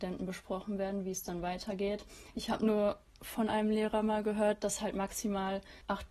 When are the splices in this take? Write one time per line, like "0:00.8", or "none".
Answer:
none